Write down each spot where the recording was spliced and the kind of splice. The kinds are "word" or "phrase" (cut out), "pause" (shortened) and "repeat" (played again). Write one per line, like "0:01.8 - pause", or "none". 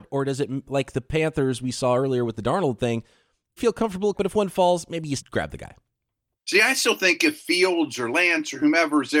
0:03.6 - word
0:04.1 - word
0:05.2 - word